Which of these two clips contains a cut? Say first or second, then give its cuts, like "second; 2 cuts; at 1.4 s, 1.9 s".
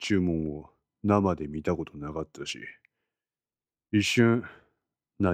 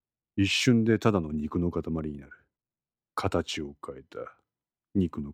second; 1 cut; at 2.6 s